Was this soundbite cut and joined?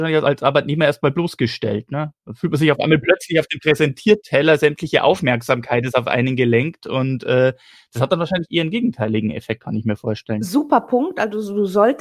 no; 0 cuts

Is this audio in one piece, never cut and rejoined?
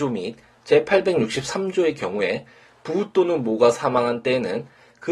yes; 0 cuts

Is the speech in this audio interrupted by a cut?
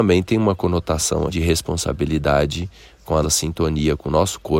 yes; 2 cuts; at 1.3 s, 3.2 s

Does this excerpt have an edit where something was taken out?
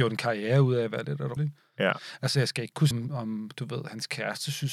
yes; 2 cuts; at 1.4 s, 2.9 s

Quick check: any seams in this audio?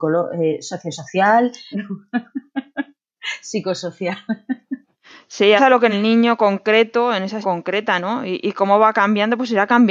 yes; 4 cuts; at 1.7 s, 5.6 s, 5.9 s, 7.4 s

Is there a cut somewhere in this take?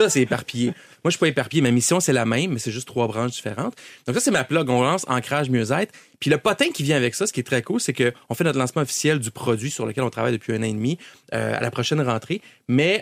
no; 0 cuts

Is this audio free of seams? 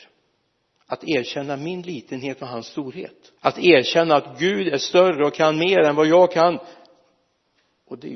no; 1 cut; at 3.4 s

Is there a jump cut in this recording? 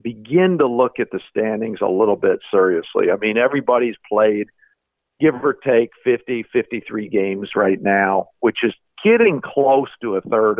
no; 0 cuts

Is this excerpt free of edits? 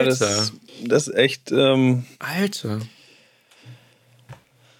no; 2 cuts; at 1.1 s, 2.1 s

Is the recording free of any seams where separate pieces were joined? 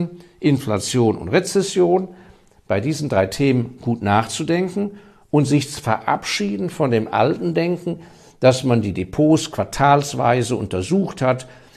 yes; 0 cuts

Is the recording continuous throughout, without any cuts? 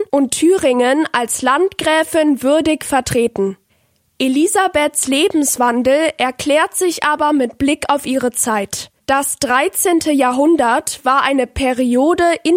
yes; 0 cuts

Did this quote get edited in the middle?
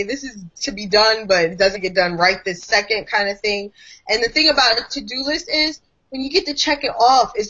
yes; 1 cut; at 1.7 s

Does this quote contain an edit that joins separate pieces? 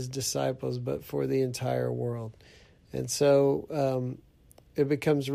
no; 0 cuts

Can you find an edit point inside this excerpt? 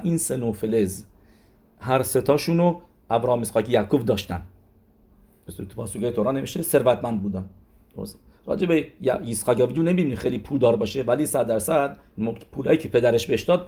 no; 0 cuts

